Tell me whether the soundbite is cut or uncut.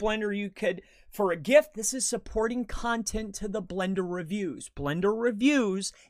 uncut